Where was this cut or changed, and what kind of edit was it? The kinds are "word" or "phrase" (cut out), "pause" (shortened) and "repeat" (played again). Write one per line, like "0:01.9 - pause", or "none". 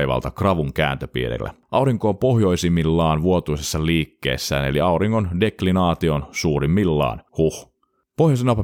0:07.3 - pause

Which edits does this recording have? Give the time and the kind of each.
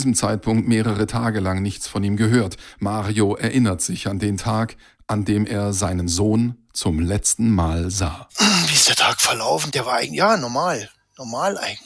none

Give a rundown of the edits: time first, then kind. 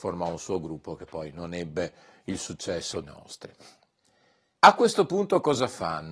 0:03.0 - word

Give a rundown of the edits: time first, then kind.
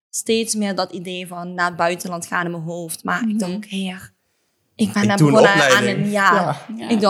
none

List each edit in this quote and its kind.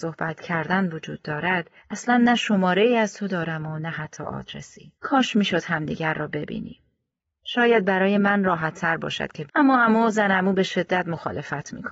0:01.8 - pause
0:04.9 - pause
0:09.5 - phrase

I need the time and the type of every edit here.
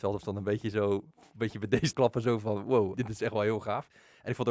0:01.1 - pause
0:01.9 - phrase
0:02.9 - word

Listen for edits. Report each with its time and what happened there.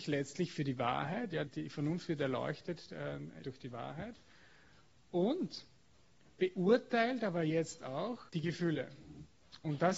0:01.5 - word
0:03.4 - word
0:08.3 - pause

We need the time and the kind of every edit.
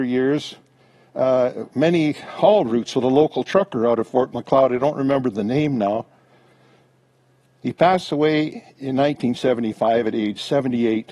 none

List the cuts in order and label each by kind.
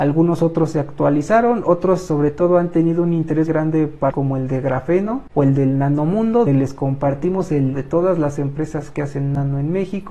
0:03.5 - word
0:04.1 - word
0:06.5 - word
0:07.7 - word

